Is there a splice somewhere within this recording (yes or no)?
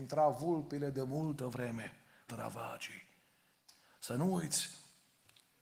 yes